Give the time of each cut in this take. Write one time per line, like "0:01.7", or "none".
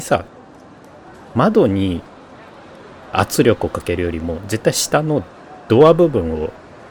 0:03.1

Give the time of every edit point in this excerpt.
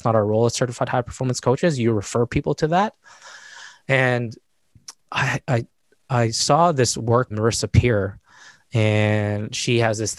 0:05.1
0:07.3

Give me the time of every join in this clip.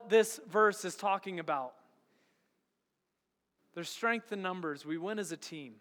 none

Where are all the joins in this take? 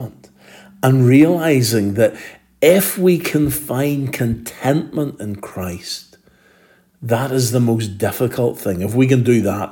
none

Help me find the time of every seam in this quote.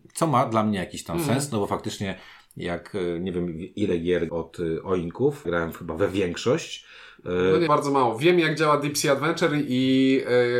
0:04.3
0:05.4
0:07.7

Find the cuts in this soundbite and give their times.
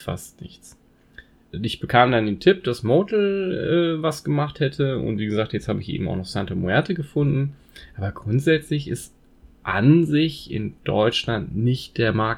none

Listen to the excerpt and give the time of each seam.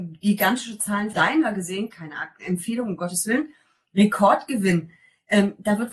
0:01.1

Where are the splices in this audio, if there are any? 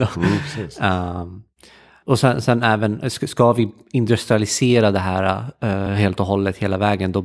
none

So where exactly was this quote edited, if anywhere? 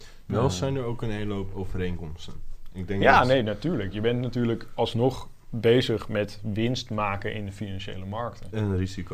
none

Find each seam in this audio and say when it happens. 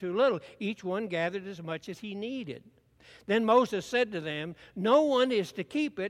none

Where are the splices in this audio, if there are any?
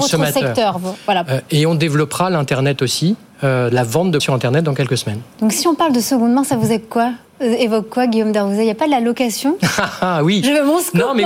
0:04.2

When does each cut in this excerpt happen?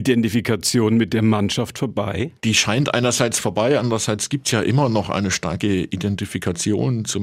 0:02.4

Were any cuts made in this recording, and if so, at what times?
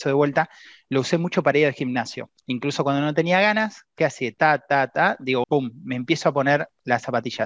0:02.4
0:05.4

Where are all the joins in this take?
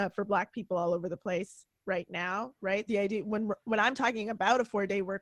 0:02.9

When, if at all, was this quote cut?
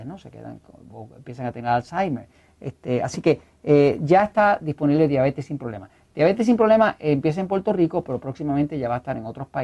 none

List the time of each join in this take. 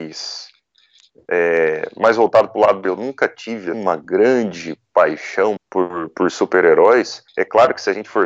0:02.8
0:03.7
0:05.6
0:07.3

